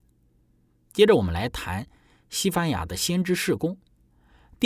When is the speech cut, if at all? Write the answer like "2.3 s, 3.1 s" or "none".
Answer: none